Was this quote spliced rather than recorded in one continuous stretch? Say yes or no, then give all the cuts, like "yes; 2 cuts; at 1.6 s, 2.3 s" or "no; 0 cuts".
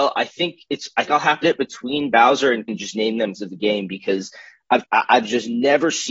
yes; 5 cuts; at 1.1 s, 1.4 s, 2.7 s, 3.3 s, 4.8 s